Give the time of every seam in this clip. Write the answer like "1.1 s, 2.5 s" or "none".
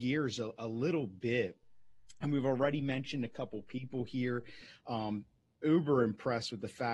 none

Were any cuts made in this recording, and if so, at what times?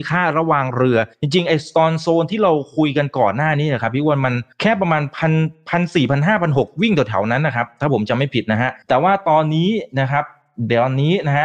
1.1 s, 4.5 s, 8.8 s

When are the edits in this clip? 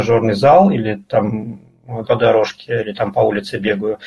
2.0 s

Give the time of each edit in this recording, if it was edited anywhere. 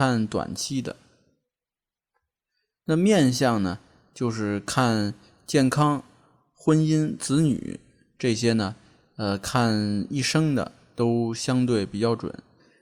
none

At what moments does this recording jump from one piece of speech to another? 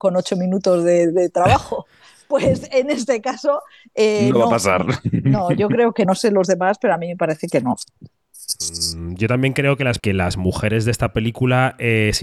6.0 s, 10.0 s

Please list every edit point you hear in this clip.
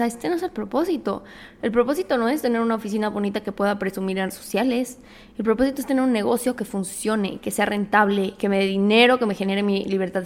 4.3 s

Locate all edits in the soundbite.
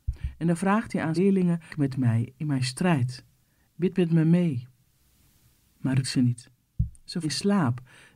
1.2 s, 1.7 s, 6.0 s, 7.2 s

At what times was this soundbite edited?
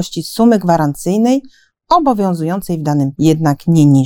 3.1 s

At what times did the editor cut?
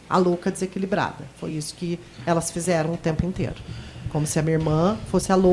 none

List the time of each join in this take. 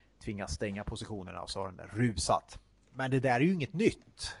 none

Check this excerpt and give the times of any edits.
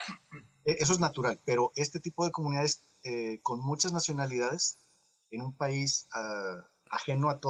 none

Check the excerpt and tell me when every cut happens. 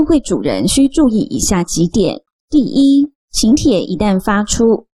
2.3 s, 3.2 s

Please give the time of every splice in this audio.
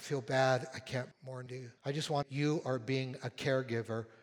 1.1 s, 1.5 s, 1.8 s, 2.2 s

